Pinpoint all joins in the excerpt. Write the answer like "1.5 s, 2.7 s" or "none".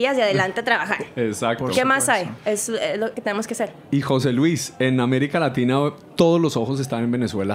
3.1 s